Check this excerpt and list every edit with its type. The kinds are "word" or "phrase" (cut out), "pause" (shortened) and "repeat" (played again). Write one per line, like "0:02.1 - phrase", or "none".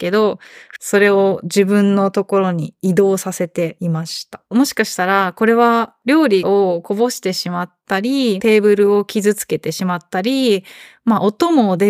0:04.5 - pause